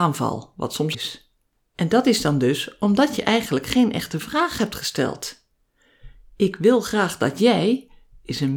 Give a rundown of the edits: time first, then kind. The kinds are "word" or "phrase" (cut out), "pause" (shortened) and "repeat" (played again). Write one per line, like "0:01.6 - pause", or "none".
0:00.9 - word